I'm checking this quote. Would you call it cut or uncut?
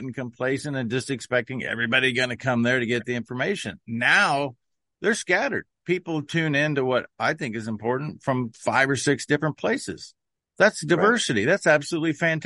uncut